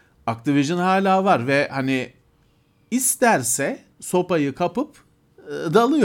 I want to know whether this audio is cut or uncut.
cut